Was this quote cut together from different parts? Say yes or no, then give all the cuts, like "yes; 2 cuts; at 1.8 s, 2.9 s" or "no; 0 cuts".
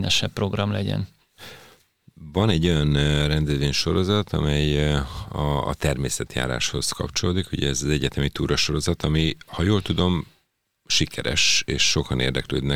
no; 0 cuts